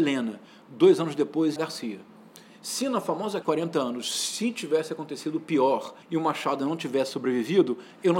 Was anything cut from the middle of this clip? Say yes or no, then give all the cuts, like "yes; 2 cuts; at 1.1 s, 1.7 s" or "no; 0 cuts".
yes; 3 cuts; at 1.6 s, 3.4 s, 6.0 s